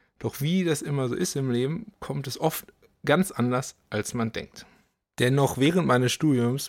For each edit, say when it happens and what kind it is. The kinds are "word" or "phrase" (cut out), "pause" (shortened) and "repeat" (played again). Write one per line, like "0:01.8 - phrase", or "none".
none